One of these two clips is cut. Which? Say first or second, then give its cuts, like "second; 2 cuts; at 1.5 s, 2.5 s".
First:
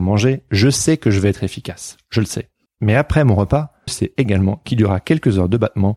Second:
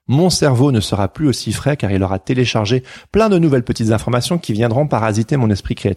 first; 2 cuts; at 2.7 s, 3.9 s